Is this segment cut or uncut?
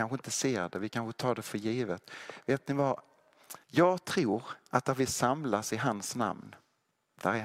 cut